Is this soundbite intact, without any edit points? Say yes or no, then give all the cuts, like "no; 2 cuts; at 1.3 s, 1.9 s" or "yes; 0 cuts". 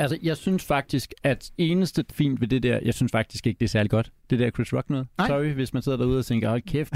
no; 2 cuts; at 1.5 s, 2.1 s